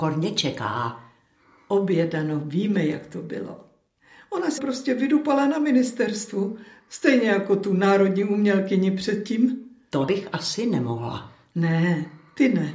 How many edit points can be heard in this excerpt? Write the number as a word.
two